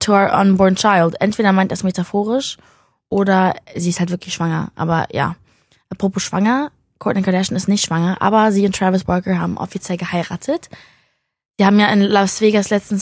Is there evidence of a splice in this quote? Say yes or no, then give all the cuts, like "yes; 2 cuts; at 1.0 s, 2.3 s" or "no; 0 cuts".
no; 0 cuts